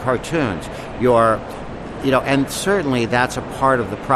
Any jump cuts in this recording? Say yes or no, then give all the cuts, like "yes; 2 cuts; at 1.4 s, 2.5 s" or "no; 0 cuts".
no; 0 cuts